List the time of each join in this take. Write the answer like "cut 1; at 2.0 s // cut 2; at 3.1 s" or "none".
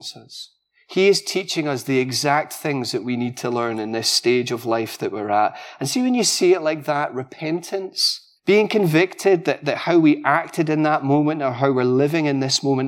cut 1; at 8.4 s